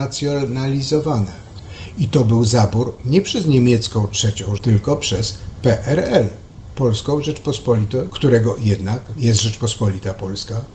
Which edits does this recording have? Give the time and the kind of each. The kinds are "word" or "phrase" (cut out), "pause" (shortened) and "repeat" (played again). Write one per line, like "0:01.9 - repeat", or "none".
0:04.6 - word
0:08.1 - word